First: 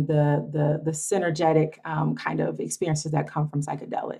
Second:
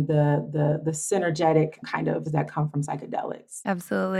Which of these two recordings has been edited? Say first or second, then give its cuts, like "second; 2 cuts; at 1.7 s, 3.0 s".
second; 2 cuts; at 1.8 s, 2.3 s